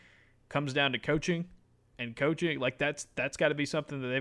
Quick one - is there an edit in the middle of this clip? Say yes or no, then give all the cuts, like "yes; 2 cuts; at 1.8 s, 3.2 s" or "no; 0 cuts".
no; 0 cuts